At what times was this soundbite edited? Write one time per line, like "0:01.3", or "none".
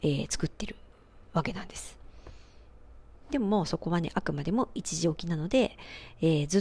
none